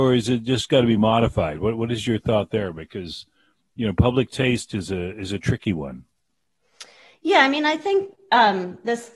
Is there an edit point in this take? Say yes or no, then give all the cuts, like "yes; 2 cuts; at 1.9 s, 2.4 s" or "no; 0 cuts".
no; 0 cuts